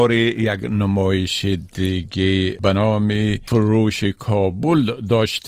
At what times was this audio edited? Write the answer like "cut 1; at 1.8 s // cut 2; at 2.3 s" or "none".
none